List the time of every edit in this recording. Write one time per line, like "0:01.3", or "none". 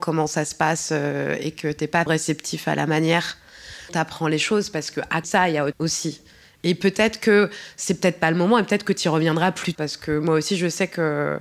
0:02.1
0:03.9
0:05.2
0:05.7
0:09.7